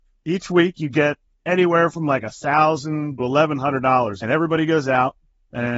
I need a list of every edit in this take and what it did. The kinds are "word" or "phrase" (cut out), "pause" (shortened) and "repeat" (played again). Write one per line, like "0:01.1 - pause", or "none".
0:01.3 - pause
0:03.2 - word
0:04.2 - phrase

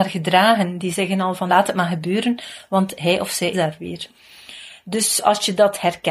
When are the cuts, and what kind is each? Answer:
0:01.5 - word
0:03.5 - word

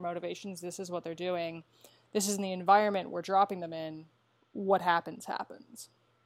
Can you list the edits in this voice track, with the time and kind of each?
0:04.4 - pause

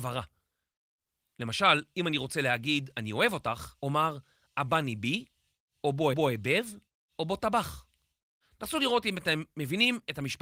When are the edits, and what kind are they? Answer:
0:03.8 - pause
0:06.1 - repeat

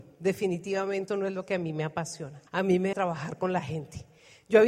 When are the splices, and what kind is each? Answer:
0:01.1 - word
0:02.5 - pause
0:02.9 - word

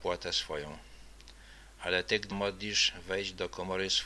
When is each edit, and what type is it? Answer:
0:02.3 - word

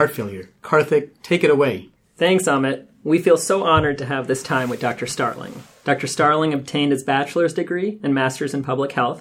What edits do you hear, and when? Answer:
none

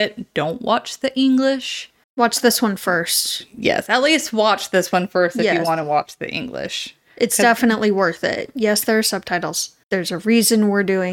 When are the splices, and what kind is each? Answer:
0:02.0 - pause
0:09.8 - pause

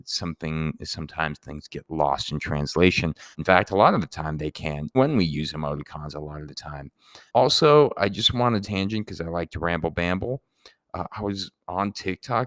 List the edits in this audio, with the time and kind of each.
0:01.7 - word
0:03.3 - pause
0:04.9 - word
0:07.3 - pause
0:08.6 - phrase

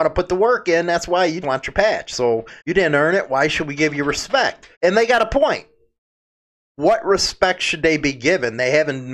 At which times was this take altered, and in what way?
0:01.4 - word
0:02.6 - pause
0:04.7 - pause

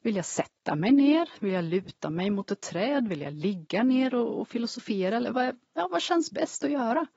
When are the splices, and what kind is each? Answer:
0:05.3 - word

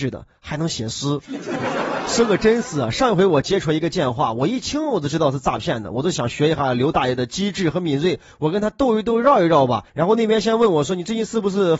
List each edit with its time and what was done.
0:09.9 - pause

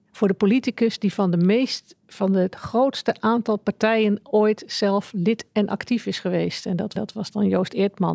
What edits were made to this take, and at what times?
0:07.0 - repeat

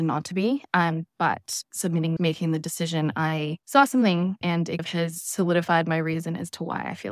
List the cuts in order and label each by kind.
0:01.7 - phrase
0:02.2 - phrase
0:03.6 - pause
0:04.4 - word
0:04.8 - word

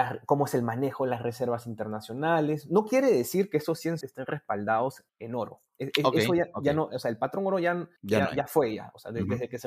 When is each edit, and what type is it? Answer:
0:04.0 - phrase
0:05.1 - pause
0:08.0 - pause

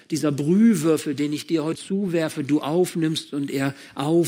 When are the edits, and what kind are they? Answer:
0:01.7 - word

